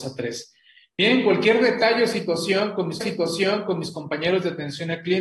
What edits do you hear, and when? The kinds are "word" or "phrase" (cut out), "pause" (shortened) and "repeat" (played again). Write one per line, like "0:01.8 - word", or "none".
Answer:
0:03.0 - repeat